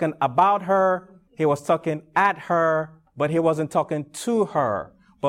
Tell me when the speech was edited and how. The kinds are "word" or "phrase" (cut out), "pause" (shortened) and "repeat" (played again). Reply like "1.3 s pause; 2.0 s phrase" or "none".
1.3 s pause